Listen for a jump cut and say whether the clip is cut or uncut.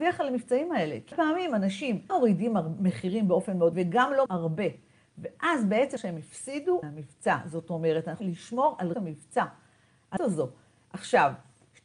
cut